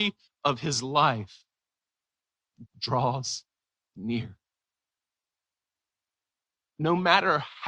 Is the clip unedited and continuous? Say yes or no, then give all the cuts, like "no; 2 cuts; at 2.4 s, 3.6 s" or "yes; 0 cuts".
no; 1 cut; at 2.7 s